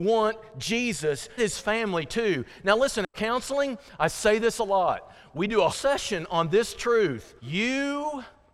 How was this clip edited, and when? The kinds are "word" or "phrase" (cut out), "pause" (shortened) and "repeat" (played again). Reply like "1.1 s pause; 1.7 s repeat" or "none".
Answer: 1.4 s phrase; 3.1 s word; 5.7 s word; 7.4 s pause